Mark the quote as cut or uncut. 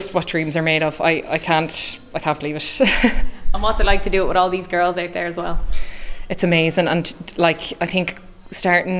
uncut